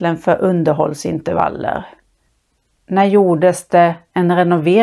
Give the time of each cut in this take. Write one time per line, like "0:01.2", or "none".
none